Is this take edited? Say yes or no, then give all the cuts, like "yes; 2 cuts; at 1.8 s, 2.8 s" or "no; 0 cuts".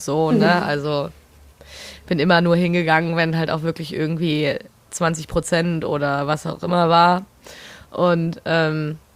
no; 0 cuts